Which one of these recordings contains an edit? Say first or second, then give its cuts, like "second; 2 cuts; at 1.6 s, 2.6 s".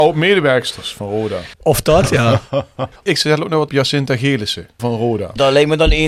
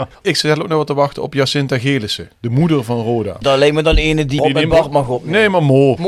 first; 3 cuts; at 1.5 s, 3.7 s, 4.8 s